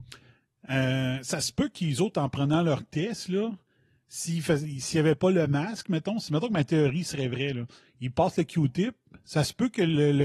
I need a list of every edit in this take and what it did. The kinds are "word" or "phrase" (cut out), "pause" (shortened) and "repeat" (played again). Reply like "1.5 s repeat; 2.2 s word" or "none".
none